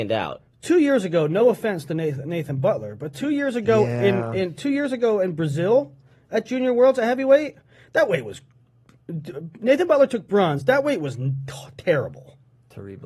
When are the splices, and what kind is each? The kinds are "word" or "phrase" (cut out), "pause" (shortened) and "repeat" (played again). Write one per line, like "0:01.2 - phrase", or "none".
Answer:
none